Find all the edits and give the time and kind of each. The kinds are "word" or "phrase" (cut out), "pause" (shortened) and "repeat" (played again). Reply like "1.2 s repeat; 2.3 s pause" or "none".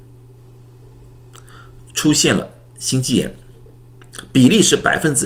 none